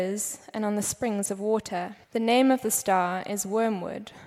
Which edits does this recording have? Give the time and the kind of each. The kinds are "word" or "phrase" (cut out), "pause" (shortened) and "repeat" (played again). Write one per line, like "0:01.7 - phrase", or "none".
0:02.0 - pause